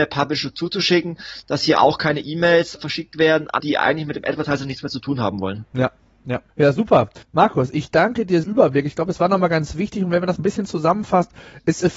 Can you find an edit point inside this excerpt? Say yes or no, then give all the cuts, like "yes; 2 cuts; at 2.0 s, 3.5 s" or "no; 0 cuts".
yes; 6 cuts; at 2.7 s, 3.6 s, 6.5 s, 7.2 s, 8.4 s, 10.4 s